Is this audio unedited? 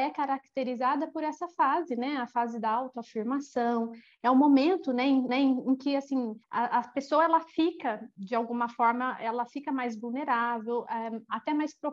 no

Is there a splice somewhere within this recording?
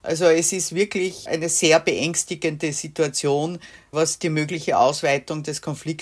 no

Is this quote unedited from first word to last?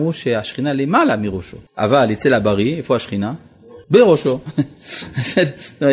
no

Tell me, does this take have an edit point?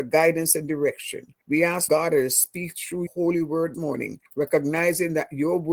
yes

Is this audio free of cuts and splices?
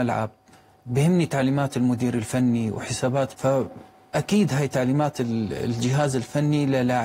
no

